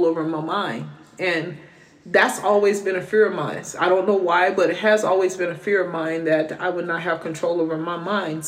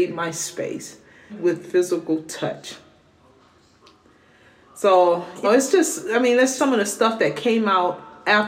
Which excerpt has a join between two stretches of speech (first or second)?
second